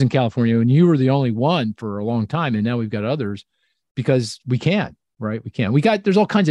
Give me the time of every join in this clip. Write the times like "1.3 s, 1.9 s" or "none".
none